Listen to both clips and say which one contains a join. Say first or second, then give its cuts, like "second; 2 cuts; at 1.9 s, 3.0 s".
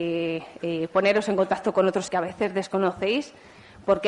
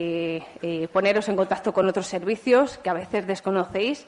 first; 1 cut; at 2.1 s